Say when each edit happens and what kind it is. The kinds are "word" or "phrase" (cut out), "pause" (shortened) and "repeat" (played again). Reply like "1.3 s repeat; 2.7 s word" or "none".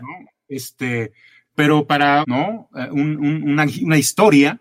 1.5 s word; 2.2 s phrase